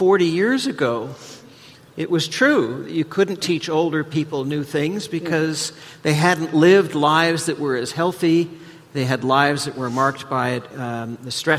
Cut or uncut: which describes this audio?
uncut